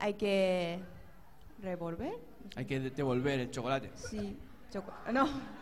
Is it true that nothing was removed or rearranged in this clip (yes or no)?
yes